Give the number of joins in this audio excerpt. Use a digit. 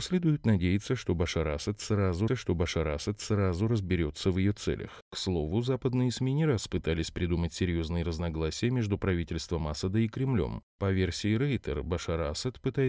1